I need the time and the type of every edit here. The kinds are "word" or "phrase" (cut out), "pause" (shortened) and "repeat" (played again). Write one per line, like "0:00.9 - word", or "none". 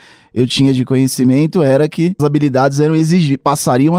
0:02.2 - word